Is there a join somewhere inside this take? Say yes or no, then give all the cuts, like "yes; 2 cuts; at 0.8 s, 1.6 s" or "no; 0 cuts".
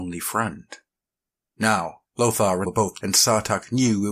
yes; 3 cuts; at 2.0 s, 2.6 s, 3.0 s